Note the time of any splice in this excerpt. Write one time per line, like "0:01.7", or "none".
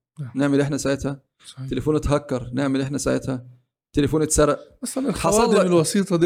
none